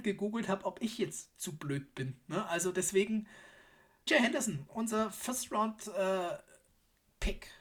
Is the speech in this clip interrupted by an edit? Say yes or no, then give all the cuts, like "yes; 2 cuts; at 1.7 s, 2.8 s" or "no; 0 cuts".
yes; 1 cut; at 4.1 s